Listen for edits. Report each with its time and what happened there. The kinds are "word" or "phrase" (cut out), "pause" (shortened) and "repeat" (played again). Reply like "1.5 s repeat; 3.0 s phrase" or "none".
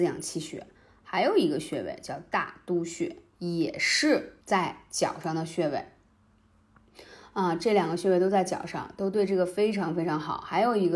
4.4 s pause